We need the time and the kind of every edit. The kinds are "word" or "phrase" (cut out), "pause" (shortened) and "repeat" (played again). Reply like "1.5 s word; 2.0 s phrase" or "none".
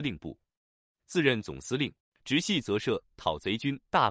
2.0 s pause